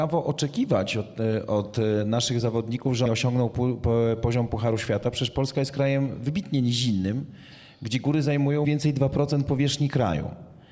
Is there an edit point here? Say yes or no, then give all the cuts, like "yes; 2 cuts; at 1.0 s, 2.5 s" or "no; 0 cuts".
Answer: yes; 2 cuts; at 3.1 s, 8.6 s